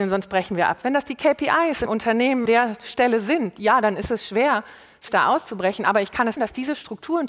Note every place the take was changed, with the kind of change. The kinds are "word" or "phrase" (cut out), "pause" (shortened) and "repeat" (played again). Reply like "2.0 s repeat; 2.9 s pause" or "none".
1.9 s word; 2.5 s word; 5.1 s word; 6.4 s word